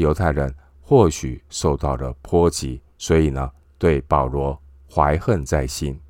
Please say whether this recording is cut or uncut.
cut